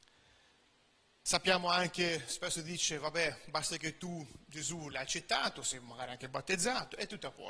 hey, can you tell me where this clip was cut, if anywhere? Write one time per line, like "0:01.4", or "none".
0:04.9